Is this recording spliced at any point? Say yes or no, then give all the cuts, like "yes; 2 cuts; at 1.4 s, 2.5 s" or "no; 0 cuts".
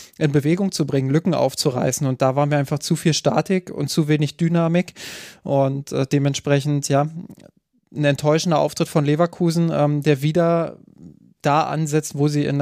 no; 0 cuts